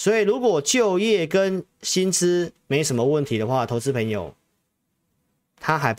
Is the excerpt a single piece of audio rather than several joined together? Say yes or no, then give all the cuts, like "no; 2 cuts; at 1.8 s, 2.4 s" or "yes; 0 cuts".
yes; 0 cuts